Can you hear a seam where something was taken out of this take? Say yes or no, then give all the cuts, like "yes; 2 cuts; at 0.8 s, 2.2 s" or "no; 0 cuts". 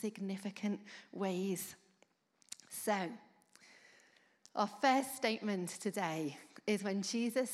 no; 0 cuts